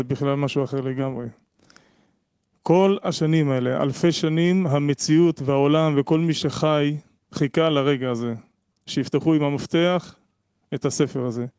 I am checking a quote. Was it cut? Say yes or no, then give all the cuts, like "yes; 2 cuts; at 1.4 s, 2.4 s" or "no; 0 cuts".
no; 0 cuts